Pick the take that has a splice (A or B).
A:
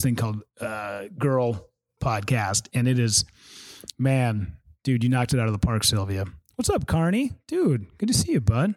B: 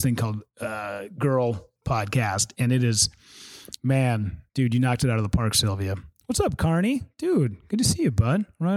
B